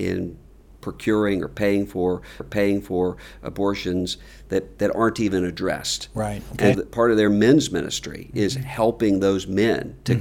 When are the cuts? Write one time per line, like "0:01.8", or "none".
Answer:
0:02.4
0:06.7